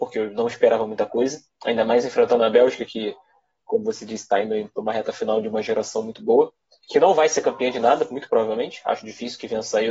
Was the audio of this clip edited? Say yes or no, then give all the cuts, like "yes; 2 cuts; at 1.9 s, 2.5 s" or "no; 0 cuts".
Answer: no; 0 cuts